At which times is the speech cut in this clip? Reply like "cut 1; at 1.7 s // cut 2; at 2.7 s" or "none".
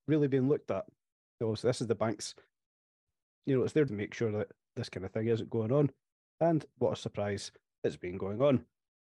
cut 1; at 3.9 s